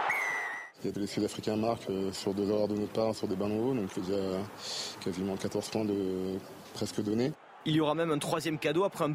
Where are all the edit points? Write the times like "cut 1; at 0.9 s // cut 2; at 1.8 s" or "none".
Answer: cut 1; at 0.9 s // cut 2; at 3.9 s